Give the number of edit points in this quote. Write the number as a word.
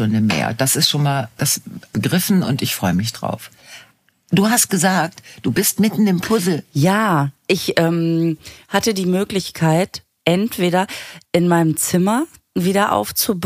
one